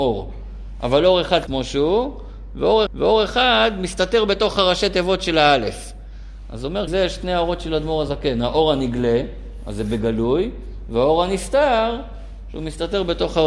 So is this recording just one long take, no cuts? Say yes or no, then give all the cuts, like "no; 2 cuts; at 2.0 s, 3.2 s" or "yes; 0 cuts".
no; 3 cuts; at 1.5 s, 2.9 s, 6.9 s